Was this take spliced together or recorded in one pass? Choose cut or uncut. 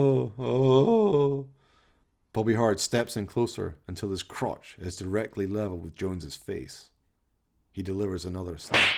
uncut